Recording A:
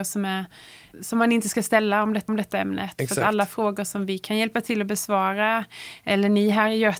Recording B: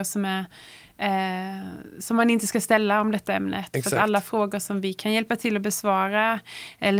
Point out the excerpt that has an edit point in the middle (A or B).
A